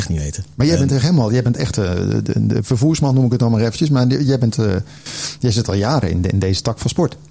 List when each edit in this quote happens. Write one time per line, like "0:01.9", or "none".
none